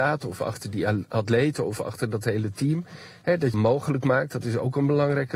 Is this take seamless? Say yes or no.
no